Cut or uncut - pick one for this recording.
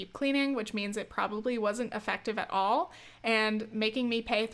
uncut